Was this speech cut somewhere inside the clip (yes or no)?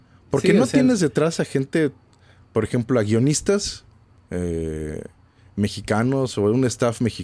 no